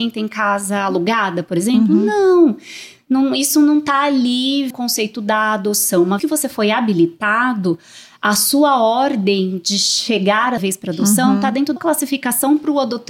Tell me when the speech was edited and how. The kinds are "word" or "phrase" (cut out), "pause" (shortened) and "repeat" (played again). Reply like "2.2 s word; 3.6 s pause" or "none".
4.7 s word; 6.2 s word; 10.6 s word; 11.8 s word